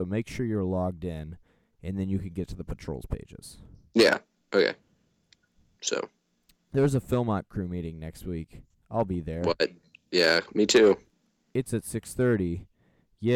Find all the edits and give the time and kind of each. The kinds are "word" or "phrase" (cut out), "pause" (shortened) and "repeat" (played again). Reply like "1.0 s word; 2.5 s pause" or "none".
none